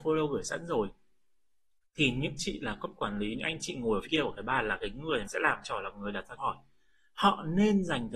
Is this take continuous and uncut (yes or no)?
no